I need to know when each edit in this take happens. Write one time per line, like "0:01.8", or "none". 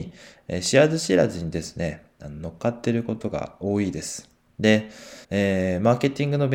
0:05.2